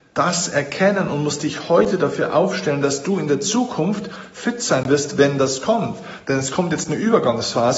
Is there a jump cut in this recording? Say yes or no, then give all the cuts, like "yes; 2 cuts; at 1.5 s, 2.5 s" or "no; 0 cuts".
no; 0 cuts